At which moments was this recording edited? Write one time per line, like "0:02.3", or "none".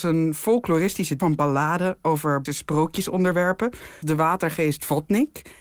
0:01.2
0:02.5
0:04.0